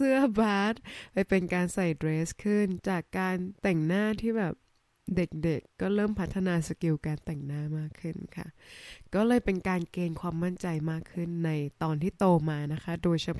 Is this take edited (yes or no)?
yes